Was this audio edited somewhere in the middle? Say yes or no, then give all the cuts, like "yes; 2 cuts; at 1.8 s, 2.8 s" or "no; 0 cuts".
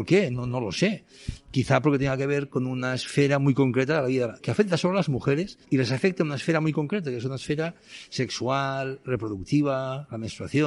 yes; 1 cut; at 5.6 s